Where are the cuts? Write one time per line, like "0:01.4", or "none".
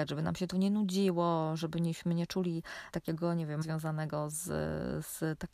0:02.9
0:03.6